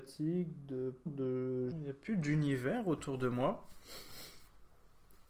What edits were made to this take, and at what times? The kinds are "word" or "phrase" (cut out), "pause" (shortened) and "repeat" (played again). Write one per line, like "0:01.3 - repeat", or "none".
0:01.1 - word
0:01.7 - word